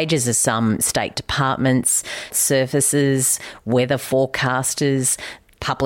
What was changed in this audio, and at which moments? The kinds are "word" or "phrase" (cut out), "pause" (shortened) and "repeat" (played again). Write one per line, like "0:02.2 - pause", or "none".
0:01.1 - word
0:02.3 - word

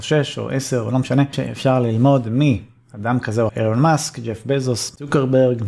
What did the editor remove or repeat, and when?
0:01.3 - word
0:03.5 - word

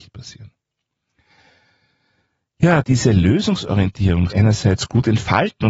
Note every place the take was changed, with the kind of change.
0:02.8 - word
0:04.3 - word

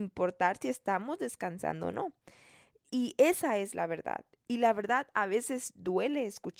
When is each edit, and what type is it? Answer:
none

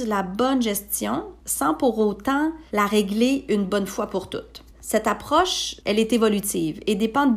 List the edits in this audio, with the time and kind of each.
0:01.4 - pause
0:02.7 - pause
0:04.7 - pause
0:05.8 - pause

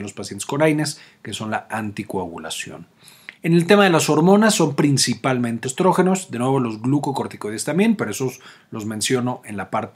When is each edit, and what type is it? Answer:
0:03.3 - pause
0:05.6 - word

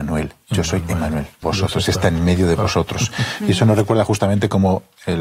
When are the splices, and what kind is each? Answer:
0:01.4 - phrase

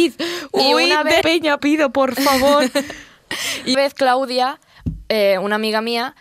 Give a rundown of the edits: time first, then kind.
0:01.2 - word
0:01.6 - phrase
0:03.7 - word

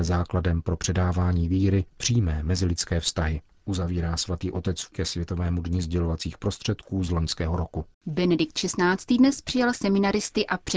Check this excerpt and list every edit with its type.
0:01.9 - pause
0:03.5 - pause
0:04.9 - word
0:07.9 - pause

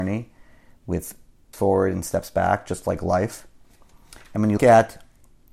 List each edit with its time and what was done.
0:01.5 - word
0:04.6 - word

